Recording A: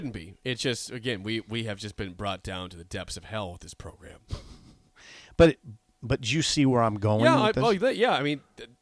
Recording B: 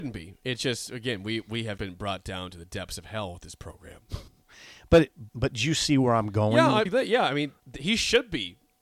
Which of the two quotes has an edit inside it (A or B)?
B